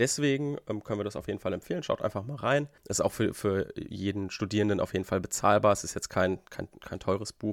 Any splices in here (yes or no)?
yes